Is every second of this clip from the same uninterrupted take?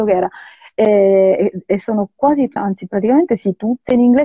no; 1 cut; at 2.6 s

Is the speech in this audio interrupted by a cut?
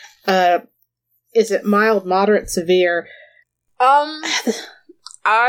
no; 0 cuts

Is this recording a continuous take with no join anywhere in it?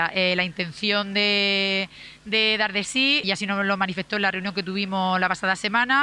no; 1 cut; at 3.2 s

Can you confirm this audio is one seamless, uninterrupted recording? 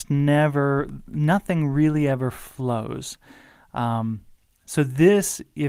yes; 0 cuts

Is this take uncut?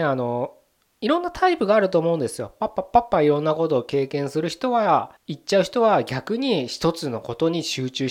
no; 1 cut; at 5.2 s

